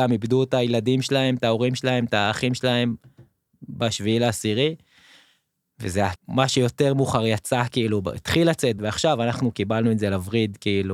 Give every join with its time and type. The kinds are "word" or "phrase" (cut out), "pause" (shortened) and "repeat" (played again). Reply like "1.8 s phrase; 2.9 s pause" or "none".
6.2 s word; 8.8 s word